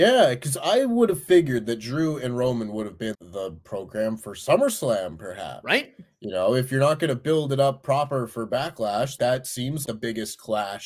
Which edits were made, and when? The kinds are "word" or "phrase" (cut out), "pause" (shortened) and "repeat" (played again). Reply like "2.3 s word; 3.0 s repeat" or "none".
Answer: 3.1 s word; 9.2 s word; 9.8 s word